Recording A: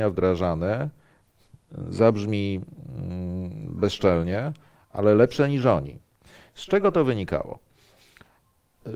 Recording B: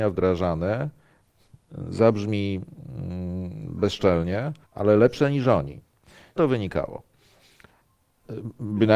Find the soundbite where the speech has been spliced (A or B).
B